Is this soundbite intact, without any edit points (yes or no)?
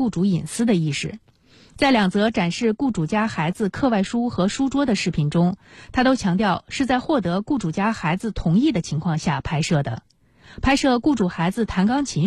yes